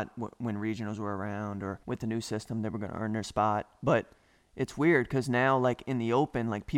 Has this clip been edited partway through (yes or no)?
yes